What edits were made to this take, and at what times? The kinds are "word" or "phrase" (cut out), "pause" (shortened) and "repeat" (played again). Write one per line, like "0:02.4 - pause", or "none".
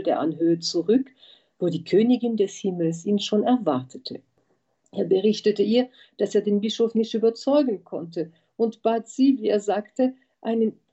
none